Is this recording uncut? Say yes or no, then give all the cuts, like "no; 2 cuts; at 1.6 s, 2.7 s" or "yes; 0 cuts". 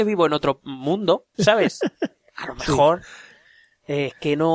no; 1 cut; at 1.3 s